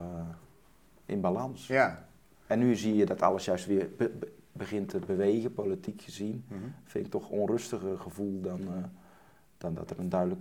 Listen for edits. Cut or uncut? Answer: uncut